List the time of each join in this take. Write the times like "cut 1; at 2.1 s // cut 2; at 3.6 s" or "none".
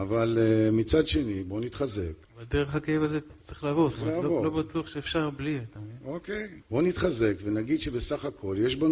cut 1; at 2.2 s // cut 2; at 6.6 s